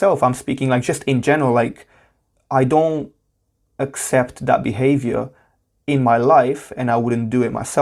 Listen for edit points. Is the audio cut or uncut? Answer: uncut